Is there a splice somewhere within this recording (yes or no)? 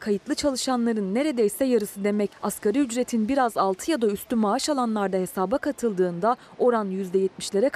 no